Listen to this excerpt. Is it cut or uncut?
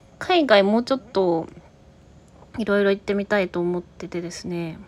uncut